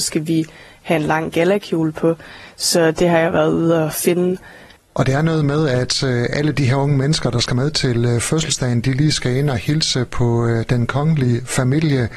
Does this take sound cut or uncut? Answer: uncut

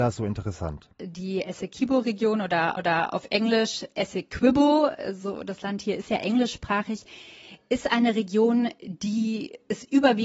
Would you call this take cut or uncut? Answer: cut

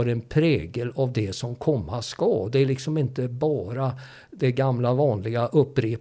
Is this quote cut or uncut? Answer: uncut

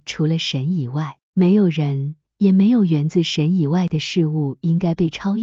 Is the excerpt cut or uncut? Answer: cut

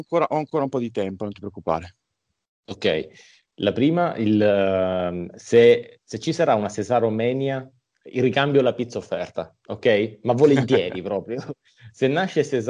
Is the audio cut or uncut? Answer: uncut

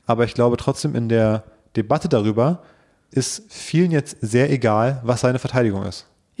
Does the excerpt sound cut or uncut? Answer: uncut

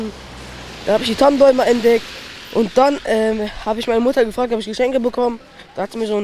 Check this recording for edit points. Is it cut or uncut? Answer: uncut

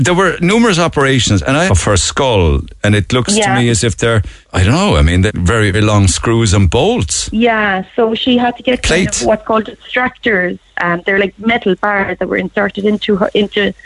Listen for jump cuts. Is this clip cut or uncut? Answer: cut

